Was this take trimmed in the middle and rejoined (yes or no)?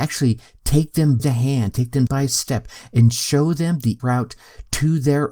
yes